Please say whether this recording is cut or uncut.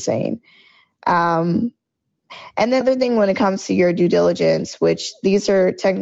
cut